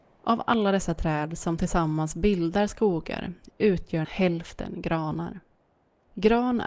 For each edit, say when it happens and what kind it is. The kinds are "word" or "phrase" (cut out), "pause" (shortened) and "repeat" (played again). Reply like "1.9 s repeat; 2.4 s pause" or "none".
4.0 s word